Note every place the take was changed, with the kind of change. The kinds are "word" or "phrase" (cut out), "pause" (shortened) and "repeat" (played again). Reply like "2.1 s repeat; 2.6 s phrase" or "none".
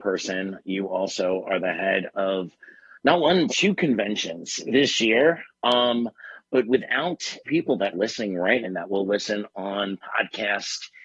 3.5 s word; 7.4 s word; 7.9 s word; 8.6 s word